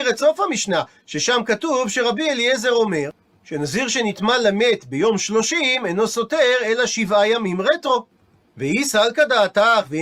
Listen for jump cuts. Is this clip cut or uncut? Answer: uncut